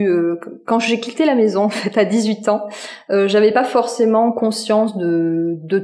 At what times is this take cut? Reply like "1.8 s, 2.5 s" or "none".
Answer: none